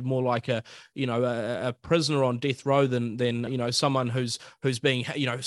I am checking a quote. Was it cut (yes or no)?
yes